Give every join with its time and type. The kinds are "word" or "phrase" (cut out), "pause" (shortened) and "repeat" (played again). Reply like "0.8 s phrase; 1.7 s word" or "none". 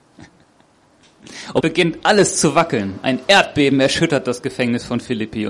1.6 s word